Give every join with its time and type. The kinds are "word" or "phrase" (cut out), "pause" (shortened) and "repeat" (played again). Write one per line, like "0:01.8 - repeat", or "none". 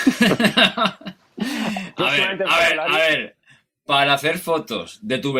none